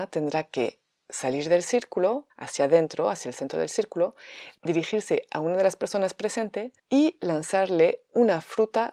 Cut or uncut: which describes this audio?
cut